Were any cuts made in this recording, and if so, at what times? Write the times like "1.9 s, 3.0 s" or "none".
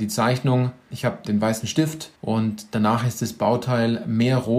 1.2 s, 2.2 s